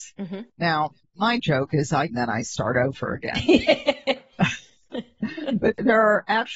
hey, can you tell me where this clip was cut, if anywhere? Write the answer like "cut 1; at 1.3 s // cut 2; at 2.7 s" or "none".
cut 1; at 1.4 s // cut 2; at 2.1 s